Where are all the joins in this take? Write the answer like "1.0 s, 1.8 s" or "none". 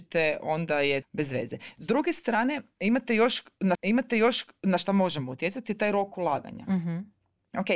1.0 s, 3.7 s

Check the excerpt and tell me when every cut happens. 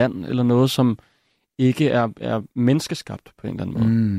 none

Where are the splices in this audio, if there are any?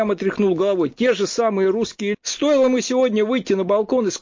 2.1 s

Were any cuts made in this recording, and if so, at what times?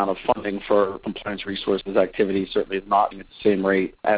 1.4 s, 3.1 s

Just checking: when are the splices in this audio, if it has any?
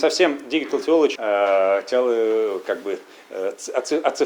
1.2 s

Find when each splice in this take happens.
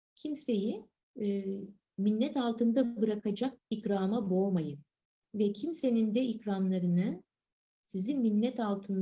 1.0 s, 3.6 s, 5.0 s

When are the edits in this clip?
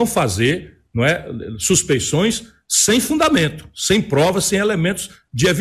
none

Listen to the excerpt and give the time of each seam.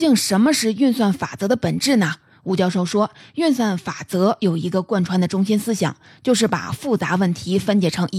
none

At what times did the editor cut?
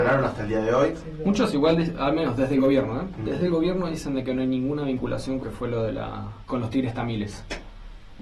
5.4 s, 6.5 s

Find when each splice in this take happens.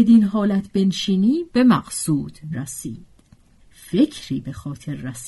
1.5 s, 2.5 s, 3.6 s

